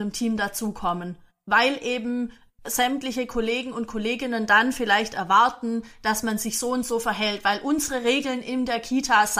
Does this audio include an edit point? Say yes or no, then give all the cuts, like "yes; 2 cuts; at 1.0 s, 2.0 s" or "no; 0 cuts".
no; 0 cuts